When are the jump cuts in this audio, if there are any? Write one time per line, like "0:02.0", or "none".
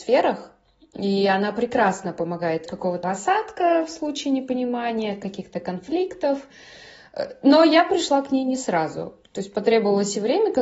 0:02.7
0:03.0